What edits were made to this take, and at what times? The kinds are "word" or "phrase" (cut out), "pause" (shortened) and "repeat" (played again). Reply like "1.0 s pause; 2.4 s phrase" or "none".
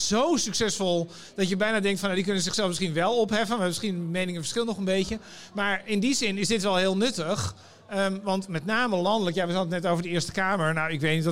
none